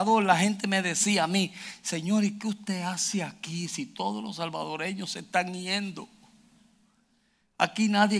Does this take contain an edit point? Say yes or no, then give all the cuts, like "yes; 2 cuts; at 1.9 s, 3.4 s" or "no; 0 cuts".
no; 0 cuts